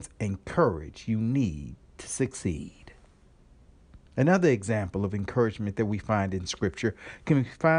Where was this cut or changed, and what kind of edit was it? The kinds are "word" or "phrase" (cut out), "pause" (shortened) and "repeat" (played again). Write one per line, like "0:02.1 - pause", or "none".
0:04.1 - pause